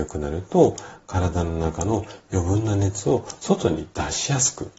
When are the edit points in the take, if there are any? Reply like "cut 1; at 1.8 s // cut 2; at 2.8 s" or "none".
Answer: none